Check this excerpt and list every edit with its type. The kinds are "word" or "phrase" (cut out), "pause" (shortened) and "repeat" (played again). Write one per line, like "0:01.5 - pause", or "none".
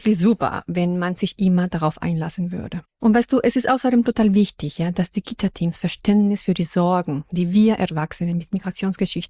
0:02.9 - pause

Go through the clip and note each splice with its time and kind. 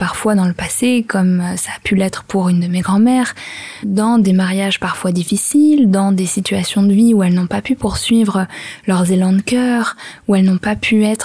0:03.8 - word

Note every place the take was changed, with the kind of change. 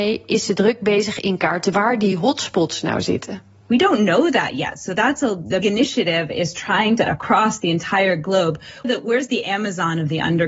0:01.7 - word
0:05.6 - word
0:07.1 - word
0:08.8 - word

